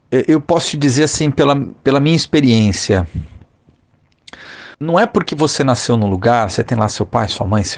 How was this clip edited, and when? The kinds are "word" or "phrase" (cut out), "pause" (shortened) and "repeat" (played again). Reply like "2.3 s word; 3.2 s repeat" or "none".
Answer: 4.7 s pause